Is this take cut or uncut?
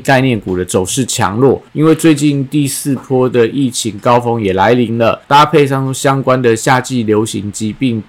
cut